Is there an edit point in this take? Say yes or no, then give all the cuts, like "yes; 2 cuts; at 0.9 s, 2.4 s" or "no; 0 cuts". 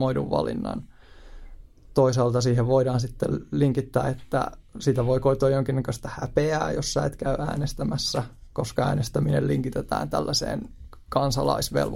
no; 0 cuts